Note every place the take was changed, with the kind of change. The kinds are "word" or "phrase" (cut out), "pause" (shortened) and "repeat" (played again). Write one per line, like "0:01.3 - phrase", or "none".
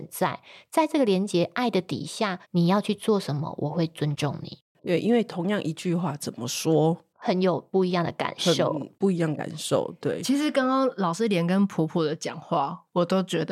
0:02.4 - pause